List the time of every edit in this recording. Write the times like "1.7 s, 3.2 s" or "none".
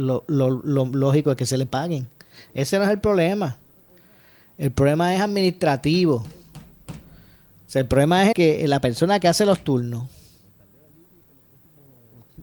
8.3 s